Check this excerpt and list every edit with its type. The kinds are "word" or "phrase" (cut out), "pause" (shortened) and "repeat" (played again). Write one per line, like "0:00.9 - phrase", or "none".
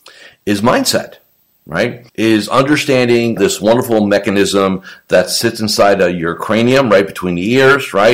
0:02.1 - pause
0:03.4 - word

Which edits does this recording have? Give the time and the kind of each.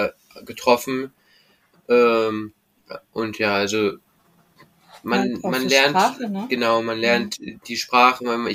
none

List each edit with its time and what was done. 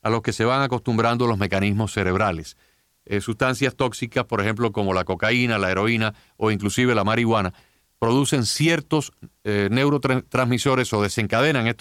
none

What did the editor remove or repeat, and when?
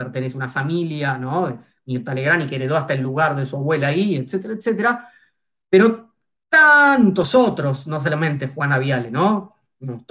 none

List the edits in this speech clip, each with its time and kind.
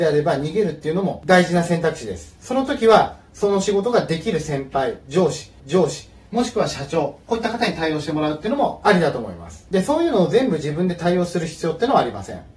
0:05.6 - repeat

